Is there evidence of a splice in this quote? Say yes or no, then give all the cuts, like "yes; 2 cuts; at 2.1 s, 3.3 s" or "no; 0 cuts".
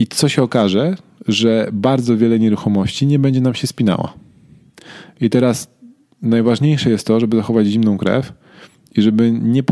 no; 0 cuts